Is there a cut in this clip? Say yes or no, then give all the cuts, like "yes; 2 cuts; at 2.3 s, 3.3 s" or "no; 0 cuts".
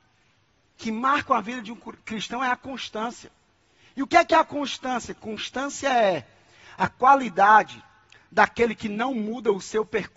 no; 0 cuts